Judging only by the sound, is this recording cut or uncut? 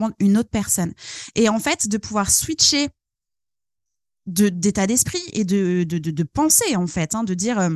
uncut